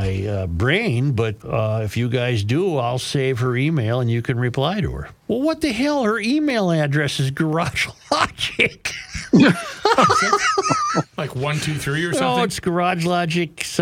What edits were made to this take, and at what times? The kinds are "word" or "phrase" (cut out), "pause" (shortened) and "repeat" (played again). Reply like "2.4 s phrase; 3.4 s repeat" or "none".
1.4 s word; 5.2 s pause